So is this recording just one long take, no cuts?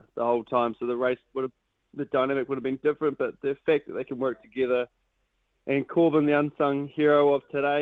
yes; 0 cuts

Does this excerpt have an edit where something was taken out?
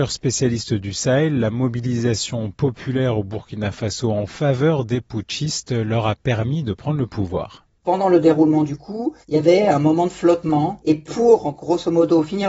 yes; 1 cut; at 9.2 s

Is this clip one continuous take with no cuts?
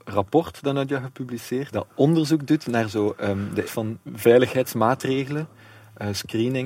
no; 3 cuts; at 1.7 s, 3.6 s, 4.0 s

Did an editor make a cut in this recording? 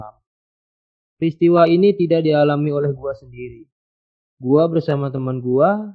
no; 0 cuts

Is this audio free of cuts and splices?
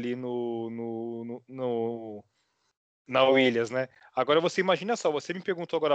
yes; 0 cuts

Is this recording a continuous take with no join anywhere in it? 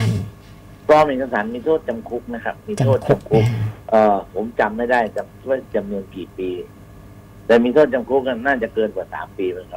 no; 1 cut; at 3.8 s

